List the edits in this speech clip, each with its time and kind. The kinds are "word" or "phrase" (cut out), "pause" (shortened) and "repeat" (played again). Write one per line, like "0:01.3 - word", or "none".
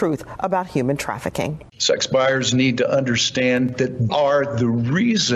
0:01.7 - pause
0:04.1 - word

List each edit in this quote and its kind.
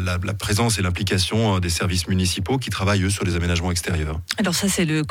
none

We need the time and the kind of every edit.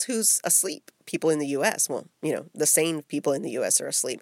0:01.0 - pause

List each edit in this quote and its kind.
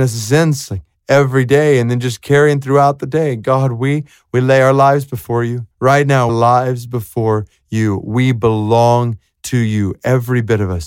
0:05.7 - pause
0:06.3 - phrase

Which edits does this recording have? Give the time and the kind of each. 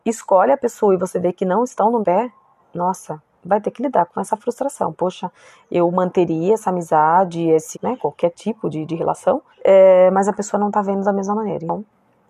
0:02.0 - word
0:07.7 - phrase
0:09.5 - pause

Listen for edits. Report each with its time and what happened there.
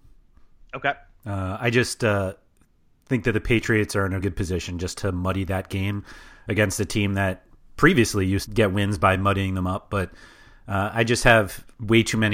0:04.2 - word
0:08.5 - word

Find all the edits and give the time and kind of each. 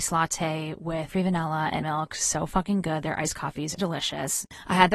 0:01.1 - word
0:01.8 - word
0:03.8 - word

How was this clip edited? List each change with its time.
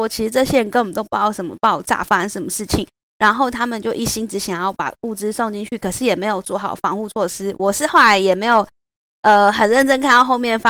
none

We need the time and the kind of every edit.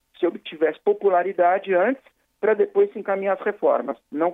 none

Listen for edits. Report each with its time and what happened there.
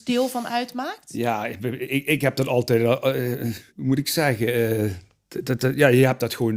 0:03.7 - pause

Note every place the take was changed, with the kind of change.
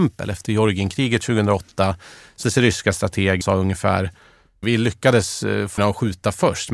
0:02.4 - word
0:03.4 - word
0:04.6 - word
0:05.8 - word

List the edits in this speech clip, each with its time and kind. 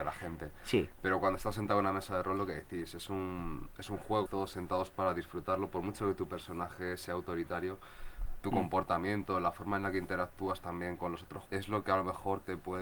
0:04.3 - word
0:11.5 - word

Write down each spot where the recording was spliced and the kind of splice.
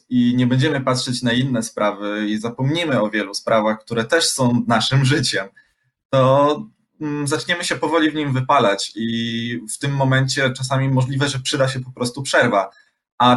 none

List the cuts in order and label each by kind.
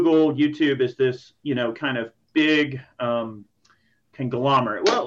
none

